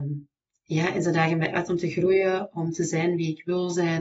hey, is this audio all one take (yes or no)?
yes